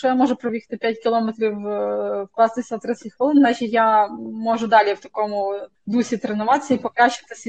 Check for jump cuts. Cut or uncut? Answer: uncut